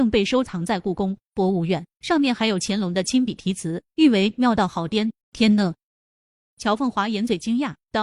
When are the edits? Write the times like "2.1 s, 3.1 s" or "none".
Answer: 5.2 s